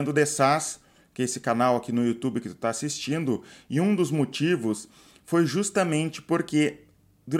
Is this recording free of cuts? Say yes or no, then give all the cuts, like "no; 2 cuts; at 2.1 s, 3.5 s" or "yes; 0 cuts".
yes; 0 cuts